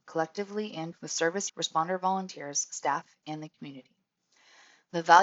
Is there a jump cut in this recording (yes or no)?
yes